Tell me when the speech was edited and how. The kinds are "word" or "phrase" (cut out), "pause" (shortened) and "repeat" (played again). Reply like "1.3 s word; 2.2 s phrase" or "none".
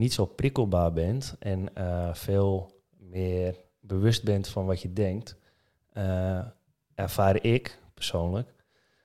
none